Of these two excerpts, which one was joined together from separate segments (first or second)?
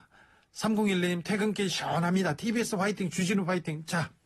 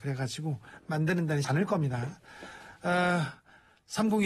second